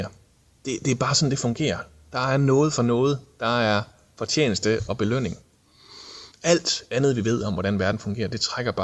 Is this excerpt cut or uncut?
uncut